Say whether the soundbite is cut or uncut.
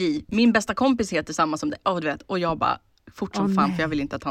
uncut